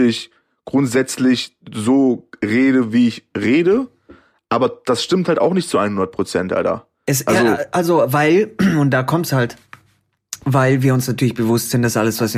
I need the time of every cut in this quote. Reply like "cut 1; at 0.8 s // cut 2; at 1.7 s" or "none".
none